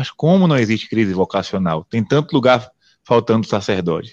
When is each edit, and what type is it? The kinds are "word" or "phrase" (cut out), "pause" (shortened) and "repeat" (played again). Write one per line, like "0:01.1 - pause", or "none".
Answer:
none